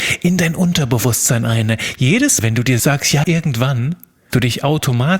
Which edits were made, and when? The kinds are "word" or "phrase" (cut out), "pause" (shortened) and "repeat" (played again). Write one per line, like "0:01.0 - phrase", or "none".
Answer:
0:02.4 - word
0:02.8 - word
0:03.2 - word
0:04.3 - word